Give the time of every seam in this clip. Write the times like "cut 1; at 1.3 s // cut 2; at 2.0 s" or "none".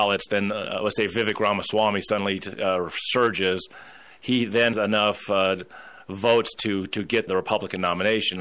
cut 1; at 4.7 s // cut 2; at 7.3 s